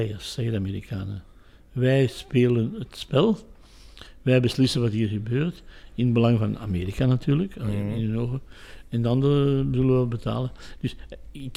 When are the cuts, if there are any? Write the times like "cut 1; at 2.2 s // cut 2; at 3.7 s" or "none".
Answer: none